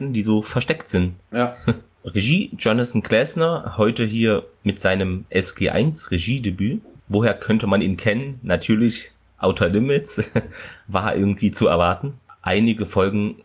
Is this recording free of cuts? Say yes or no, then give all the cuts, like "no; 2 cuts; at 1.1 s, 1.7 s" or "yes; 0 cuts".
yes; 0 cuts